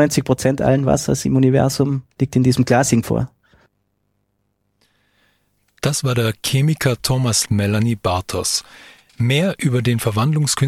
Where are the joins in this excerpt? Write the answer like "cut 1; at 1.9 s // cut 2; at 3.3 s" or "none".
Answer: cut 1; at 2.1 s // cut 2; at 3.0 s // cut 3; at 7.4 s